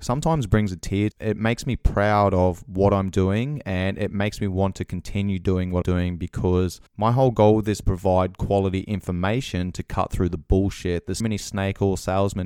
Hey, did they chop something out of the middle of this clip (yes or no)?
yes